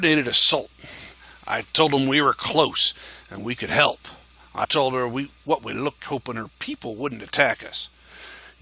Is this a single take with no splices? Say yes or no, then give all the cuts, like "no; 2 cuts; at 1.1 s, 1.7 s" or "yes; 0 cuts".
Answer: no; 2 cuts; at 4.6 s, 6.0 s